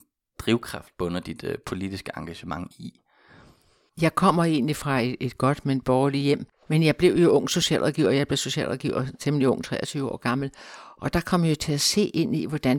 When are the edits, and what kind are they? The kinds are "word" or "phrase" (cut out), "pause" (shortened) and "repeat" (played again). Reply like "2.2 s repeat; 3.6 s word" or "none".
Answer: none